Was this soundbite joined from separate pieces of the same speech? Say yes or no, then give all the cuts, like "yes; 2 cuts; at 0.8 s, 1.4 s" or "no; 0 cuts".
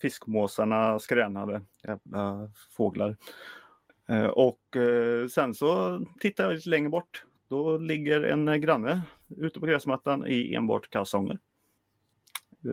yes; 2 cuts; at 1.7 s, 3.9 s